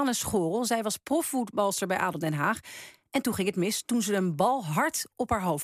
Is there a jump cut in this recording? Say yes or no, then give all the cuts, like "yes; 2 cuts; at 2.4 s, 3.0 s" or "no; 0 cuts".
no; 0 cuts